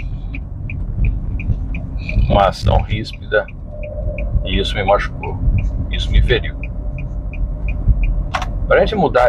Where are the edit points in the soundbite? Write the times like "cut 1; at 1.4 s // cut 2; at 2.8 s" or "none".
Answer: none